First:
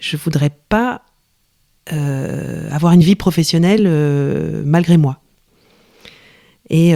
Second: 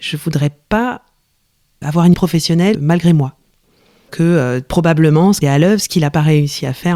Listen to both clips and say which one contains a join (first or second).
second